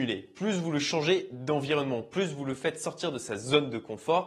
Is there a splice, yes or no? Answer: no